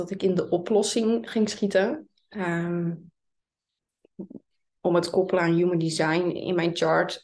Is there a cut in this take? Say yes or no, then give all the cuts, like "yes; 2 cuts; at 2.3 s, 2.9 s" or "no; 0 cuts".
no; 0 cuts